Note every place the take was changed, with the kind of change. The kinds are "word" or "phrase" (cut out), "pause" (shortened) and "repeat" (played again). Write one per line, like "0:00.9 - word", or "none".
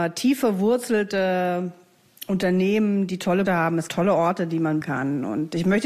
0:03.5 - word
0:03.9 - word
0:04.8 - word